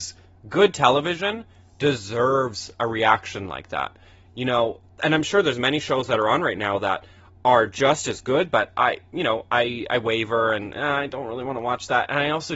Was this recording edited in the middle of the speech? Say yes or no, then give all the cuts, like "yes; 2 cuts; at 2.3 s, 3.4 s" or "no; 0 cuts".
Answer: no; 0 cuts